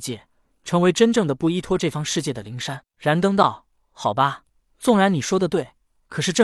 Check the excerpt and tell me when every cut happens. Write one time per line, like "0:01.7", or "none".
none